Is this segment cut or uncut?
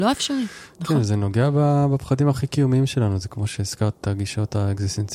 uncut